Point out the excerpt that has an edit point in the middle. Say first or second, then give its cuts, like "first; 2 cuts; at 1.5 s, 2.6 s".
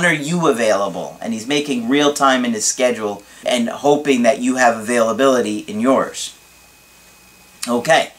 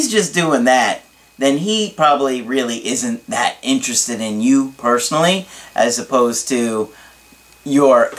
first; 1 cut; at 3.4 s